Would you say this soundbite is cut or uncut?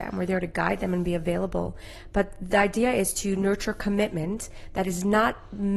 uncut